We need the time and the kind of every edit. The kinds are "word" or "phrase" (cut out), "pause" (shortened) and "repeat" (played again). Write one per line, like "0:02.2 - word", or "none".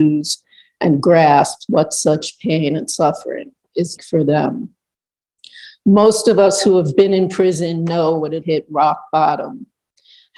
0:04.0 - word
0:08.4 - phrase